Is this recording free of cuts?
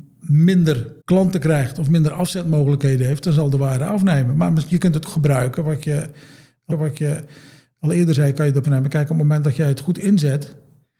no; 4 cuts; at 1.0 s, 5.0 s, 6.7 s, 8.6 s

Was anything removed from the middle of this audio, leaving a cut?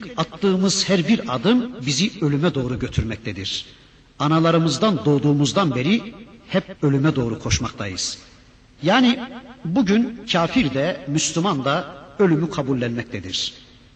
no; 0 cuts

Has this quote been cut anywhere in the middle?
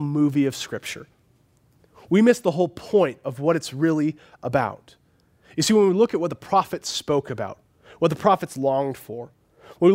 no; 0 cuts

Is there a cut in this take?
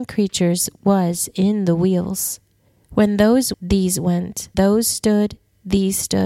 yes; 3 cuts; at 2.7 s, 3.5 s, 4.5 s

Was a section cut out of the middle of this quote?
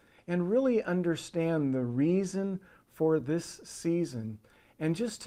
no; 0 cuts

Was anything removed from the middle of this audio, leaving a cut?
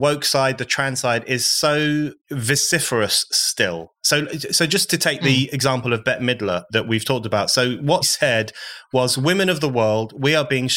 yes; 2 cuts; at 2.2 s, 8.0 s

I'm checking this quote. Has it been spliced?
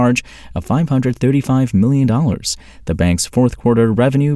no; 0 cuts

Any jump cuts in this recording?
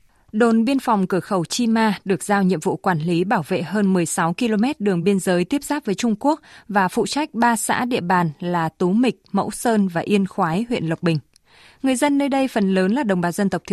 no; 0 cuts

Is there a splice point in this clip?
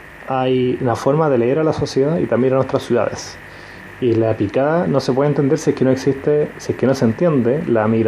no; 0 cuts

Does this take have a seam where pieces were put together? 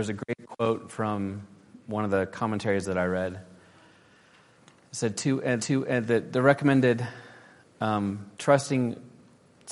yes; 2 cuts; at 5.6 s, 8.3 s

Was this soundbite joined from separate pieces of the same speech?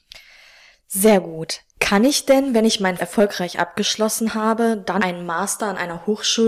yes; 2 cuts; at 3.0 s, 5.0 s

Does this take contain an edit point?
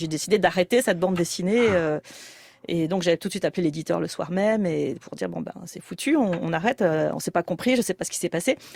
no; 0 cuts

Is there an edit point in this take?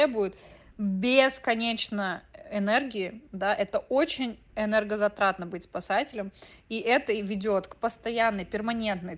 no; 0 cuts

